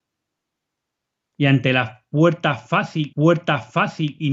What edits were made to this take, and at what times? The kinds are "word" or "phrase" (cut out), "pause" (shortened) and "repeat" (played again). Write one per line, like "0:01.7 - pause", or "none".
0:03.1 - repeat